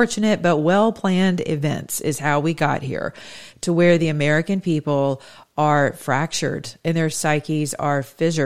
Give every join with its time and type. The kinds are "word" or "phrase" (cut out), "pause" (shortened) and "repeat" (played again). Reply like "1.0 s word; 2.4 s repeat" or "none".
none

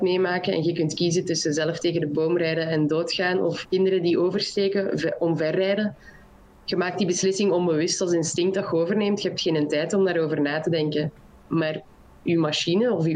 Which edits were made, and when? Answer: 3.6 s word

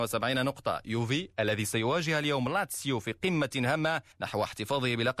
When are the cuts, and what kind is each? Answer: 4.1 s pause

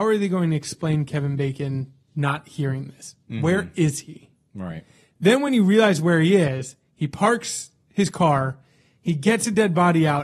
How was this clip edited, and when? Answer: none

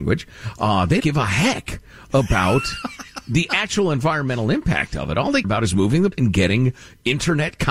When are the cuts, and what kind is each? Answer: 1.0 s word; 5.4 s word; 6.1 s word

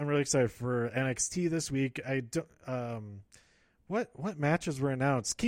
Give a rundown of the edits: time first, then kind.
none

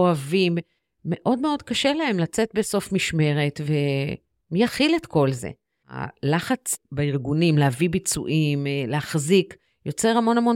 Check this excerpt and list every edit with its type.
none

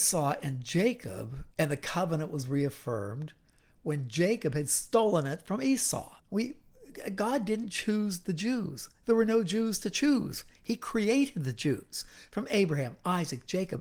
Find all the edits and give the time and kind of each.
1.5 s pause; 6.2 s pause

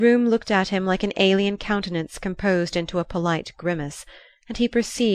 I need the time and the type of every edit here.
none

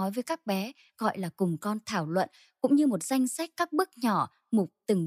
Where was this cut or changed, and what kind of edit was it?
none

